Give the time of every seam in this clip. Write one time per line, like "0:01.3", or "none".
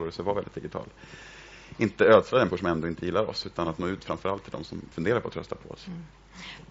0:02.5
0:04.9